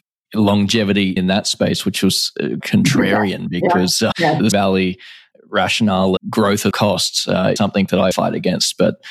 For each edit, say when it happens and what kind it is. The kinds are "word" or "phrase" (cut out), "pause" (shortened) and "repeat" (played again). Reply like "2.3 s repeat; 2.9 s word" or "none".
1.2 s word; 2.6 s word; 4.1 s word; 4.5 s word; 6.2 s word; 6.7 s word; 7.6 s word; 8.1 s word

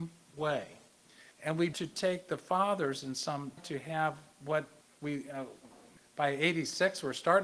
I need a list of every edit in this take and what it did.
1.3 s pause; 1.7 s word; 3.6 s phrase; 4.8 s pause; 6.0 s pause

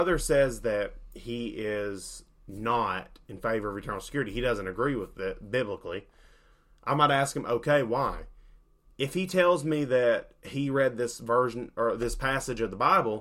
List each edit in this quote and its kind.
none

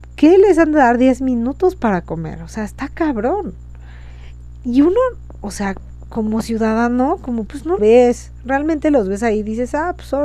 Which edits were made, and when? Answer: 4.6 s word; 7.5 s word; 7.8 s word

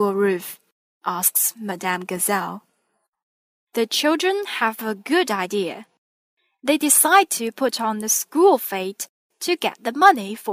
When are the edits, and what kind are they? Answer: none

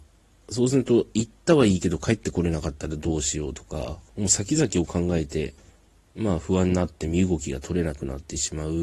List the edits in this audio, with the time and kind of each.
4.1 s pause; 5.7 s pause

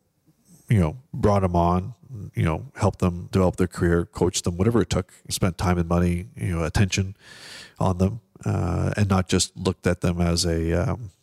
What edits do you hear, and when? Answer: 1.1 s pause; 3.3 s word; 5.3 s word

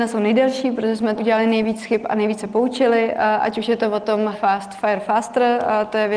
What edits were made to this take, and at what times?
1.2 s word; 4.3 s word

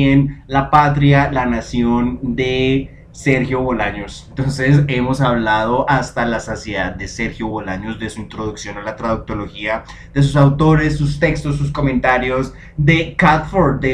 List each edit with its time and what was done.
none

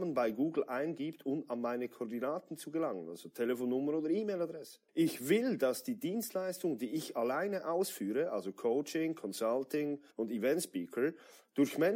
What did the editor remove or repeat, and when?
4.9 s pause; 10.1 s pause

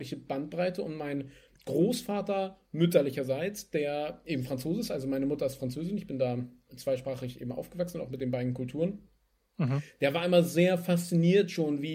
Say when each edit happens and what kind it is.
none

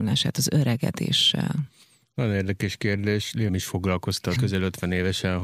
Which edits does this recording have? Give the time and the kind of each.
3.5 s word; 4.4 s word

